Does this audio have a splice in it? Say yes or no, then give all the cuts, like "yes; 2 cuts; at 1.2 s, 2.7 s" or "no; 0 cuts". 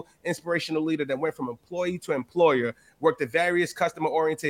no; 0 cuts